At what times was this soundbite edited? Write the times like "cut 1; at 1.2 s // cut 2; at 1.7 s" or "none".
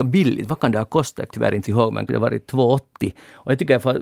cut 1; at 1.3 s // cut 2; at 1.6 s // cut 3; at 2.1 s